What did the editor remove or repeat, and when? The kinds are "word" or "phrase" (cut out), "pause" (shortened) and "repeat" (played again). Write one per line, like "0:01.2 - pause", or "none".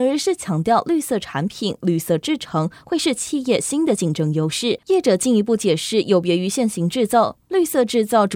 0:04.8 - pause